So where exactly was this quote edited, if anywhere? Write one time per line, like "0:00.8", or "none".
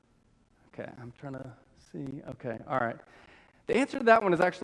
none